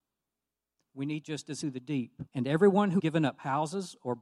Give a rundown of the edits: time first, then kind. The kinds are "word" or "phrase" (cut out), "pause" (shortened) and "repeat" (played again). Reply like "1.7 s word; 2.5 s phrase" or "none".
1.2 s phrase; 1.6 s phrase; 2.3 s pause; 3.0 s word